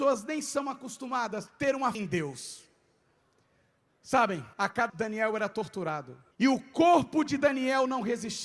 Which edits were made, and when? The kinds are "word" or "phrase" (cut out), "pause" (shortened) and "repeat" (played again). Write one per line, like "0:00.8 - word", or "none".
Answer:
0:01.5 - word
0:01.9 - word
0:04.5 - pause
0:04.9 - word
0:06.3 - pause